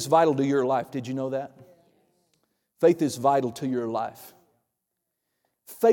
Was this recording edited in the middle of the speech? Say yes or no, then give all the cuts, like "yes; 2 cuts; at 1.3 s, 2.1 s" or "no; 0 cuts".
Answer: no; 0 cuts